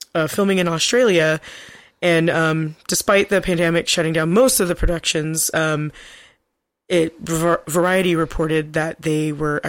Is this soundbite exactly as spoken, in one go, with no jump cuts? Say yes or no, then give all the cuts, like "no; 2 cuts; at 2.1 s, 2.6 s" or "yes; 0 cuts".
yes; 0 cuts